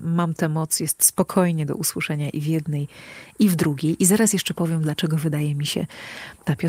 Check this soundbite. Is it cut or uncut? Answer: uncut